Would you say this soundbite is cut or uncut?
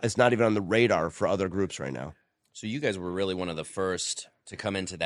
uncut